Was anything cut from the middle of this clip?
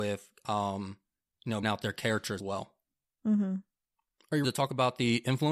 yes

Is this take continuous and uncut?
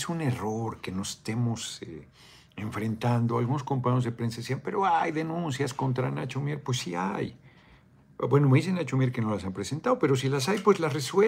yes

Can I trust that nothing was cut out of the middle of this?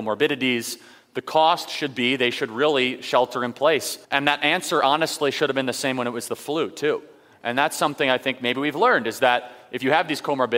no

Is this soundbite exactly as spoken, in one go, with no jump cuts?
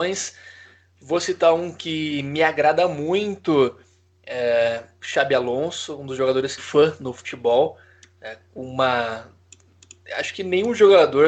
no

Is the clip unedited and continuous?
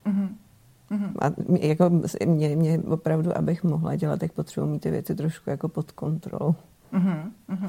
yes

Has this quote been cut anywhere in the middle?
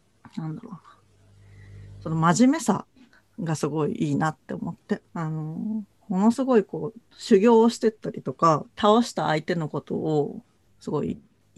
yes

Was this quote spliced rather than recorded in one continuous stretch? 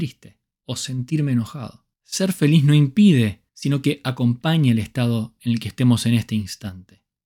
yes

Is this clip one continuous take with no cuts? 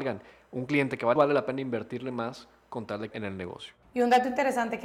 no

